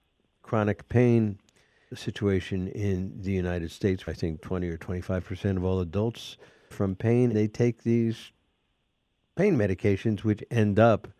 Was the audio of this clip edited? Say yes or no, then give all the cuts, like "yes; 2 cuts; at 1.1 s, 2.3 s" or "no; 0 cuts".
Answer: yes; 4 cuts; at 1.9 s, 4.1 s, 6.7 s, 7.3 s